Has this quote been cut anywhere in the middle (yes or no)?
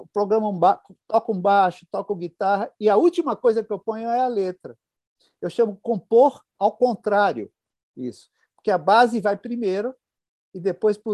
no